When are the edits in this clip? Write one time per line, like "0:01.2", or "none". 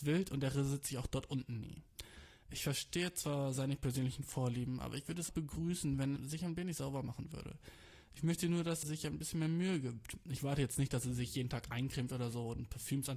0:05.3
0:06.2
0:08.8

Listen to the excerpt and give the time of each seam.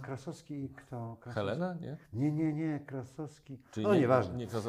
none

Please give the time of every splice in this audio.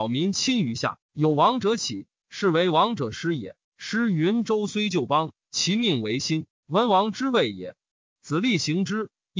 0:01.0
0:02.2
0:03.6

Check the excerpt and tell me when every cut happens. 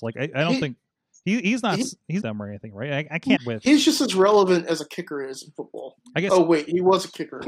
0:02.2
0:03.4

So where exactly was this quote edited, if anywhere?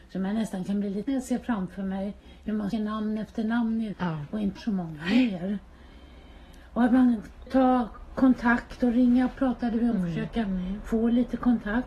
0:01.1
0:02.7
0:03.9
0:04.6
0:07.5
0:09.4
0:09.9

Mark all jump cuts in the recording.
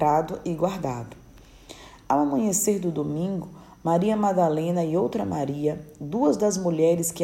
none

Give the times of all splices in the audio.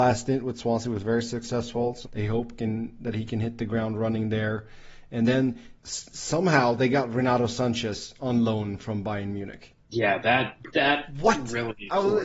0:02.0
0:05.8
0:09.8

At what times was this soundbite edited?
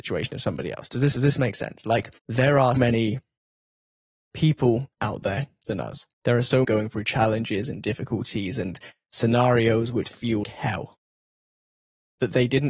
0:01.2
0:02.2
0:02.8
0:04.9
0:05.6
0:06.1
0:06.6
0:10.0
0:10.4

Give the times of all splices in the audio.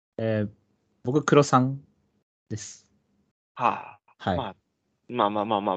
none

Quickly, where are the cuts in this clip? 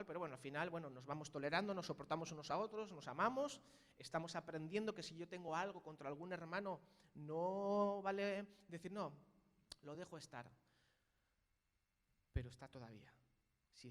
none

